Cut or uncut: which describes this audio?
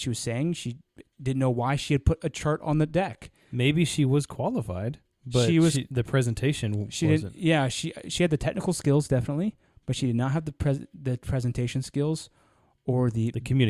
uncut